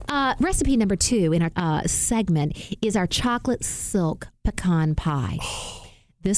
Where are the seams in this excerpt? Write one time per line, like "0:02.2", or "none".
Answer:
0:01.5